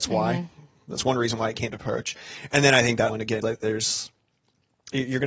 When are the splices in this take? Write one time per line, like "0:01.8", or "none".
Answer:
0:01.7
0:03.1
0:03.4